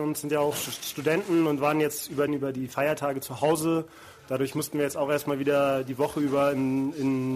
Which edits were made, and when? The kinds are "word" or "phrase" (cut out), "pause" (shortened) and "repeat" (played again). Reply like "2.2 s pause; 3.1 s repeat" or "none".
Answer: 2.3 s phrase